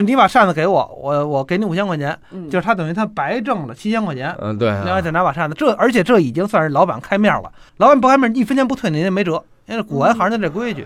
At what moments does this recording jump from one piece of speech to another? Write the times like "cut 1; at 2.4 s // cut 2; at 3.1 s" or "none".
none